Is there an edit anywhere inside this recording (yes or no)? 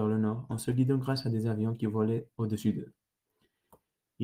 no